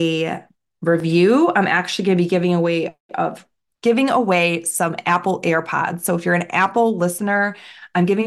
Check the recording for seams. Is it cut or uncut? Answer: uncut